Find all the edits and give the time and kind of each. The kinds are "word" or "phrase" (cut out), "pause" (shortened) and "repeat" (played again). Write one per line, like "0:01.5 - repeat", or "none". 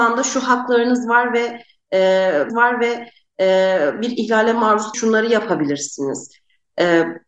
0:02.5 - repeat
0:04.9 - word